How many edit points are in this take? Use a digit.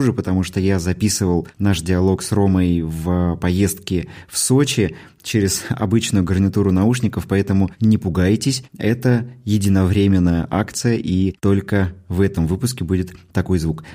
0